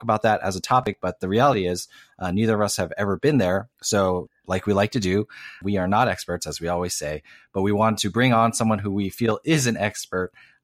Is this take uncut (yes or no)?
no